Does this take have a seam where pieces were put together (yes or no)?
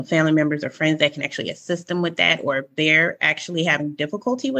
no